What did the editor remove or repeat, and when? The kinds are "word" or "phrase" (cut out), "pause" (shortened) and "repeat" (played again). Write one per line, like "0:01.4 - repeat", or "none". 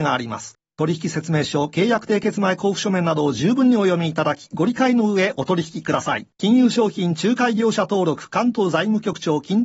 0:06.3 - pause